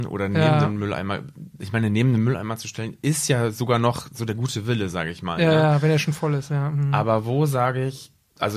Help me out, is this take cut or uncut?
uncut